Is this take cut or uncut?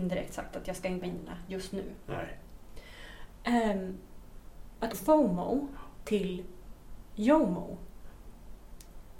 cut